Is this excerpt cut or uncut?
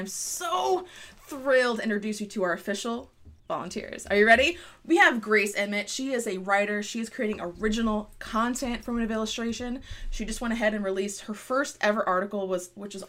cut